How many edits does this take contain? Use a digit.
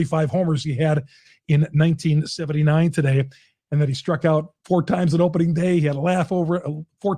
0